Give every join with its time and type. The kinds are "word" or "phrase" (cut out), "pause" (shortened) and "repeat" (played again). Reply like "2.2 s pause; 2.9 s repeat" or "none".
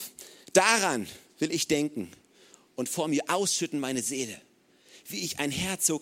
none